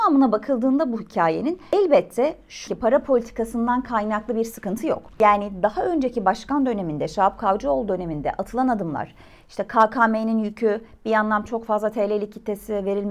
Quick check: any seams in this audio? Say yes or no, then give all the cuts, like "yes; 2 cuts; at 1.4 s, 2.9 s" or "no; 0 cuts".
yes; 2 cuts; at 2.7 s, 11.5 s